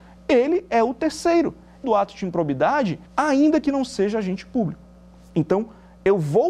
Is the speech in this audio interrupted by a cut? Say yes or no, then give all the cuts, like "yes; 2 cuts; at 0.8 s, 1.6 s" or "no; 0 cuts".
yes; 2 cuts; at 1.8 s, 3.1 s